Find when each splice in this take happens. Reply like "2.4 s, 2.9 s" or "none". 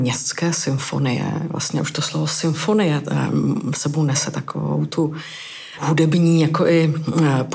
none